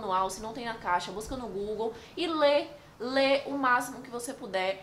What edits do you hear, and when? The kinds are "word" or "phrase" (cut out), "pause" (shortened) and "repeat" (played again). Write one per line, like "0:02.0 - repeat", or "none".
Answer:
none